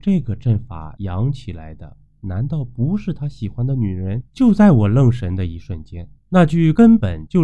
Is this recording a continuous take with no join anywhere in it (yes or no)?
no